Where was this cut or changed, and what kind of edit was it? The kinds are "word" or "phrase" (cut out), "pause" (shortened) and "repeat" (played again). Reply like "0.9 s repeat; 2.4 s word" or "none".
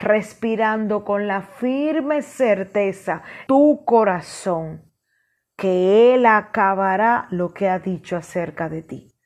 3.5 s word